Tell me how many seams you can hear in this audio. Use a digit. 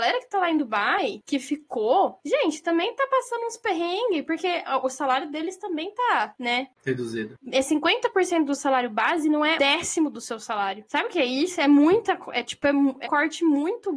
2